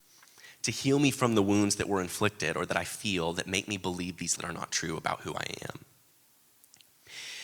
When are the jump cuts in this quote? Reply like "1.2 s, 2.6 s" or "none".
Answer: 4.4 s

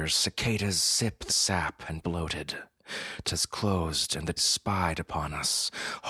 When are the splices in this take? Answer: 1.3 s, 2.0 s, 3.2 s, 4.4 s

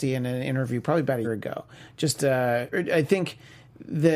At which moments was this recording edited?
1.2 s, 2.2 s, 2.7 s

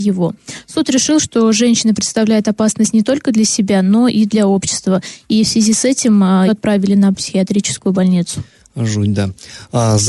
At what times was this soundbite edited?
6.5 s, 7.1 s

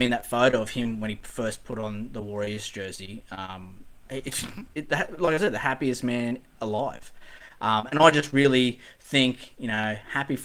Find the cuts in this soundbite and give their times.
4.7 s

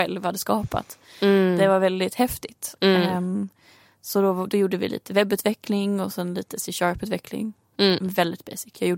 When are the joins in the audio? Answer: none

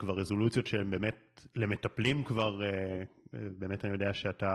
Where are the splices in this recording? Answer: none

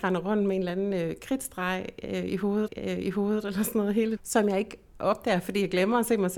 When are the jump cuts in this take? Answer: 2.7 s, 4.2 s

